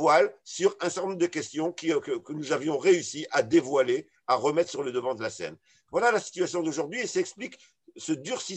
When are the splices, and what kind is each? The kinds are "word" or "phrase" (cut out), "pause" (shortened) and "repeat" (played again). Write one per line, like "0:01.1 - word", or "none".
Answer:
none